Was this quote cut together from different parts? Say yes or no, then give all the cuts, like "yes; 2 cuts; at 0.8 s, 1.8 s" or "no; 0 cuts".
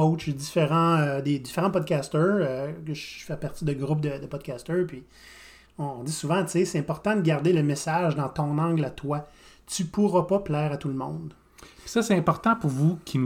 no; 0 cuts